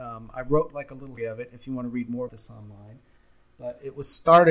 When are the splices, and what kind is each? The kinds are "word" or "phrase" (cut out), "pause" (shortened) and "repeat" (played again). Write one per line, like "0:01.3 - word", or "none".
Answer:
0:01.2 - word
0:02.3 - word